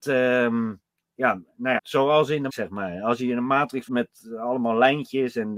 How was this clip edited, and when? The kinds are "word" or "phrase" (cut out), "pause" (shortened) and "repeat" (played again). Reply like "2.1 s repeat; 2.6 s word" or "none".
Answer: 1.8 s word; 2.5 s word; 3.9 s word